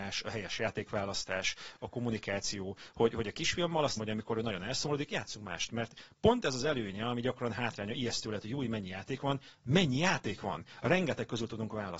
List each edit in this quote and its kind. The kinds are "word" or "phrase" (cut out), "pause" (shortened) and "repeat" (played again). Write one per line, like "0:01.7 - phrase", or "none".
0:04.0 - word

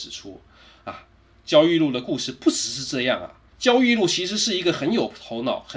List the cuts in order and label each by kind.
0:03.5 - pause

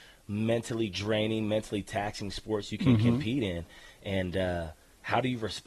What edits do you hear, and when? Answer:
none

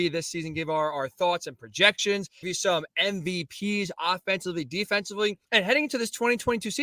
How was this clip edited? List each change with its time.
0:02.4 - word
0:05.4 - pause

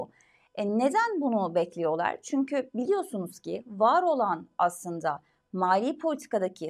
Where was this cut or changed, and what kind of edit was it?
none

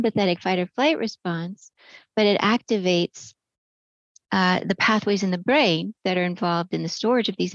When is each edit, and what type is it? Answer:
none

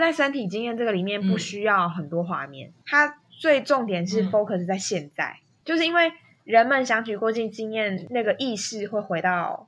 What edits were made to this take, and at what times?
none

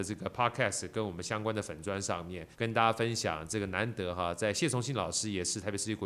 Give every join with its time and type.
0:02.5 - pause

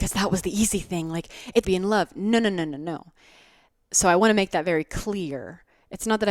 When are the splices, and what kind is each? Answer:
0:01.6 - phrase

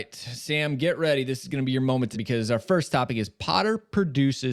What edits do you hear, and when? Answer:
0:02.1 - phrase

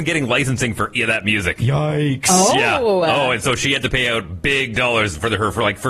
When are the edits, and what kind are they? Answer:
0:01.0 - word

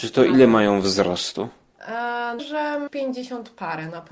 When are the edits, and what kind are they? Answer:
0:02.4 - phrase
0:02.9 - word

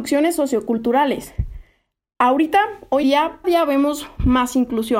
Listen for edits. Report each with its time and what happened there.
0:03.0 - word
0:03.4 - word

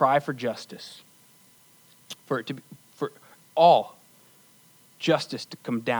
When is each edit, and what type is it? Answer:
none

